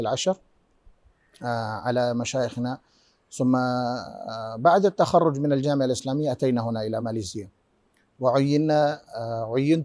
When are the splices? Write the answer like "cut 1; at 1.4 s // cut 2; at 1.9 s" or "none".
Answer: none